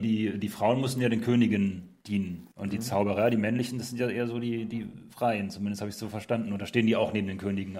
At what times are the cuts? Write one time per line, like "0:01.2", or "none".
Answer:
0:02.5
0:05.1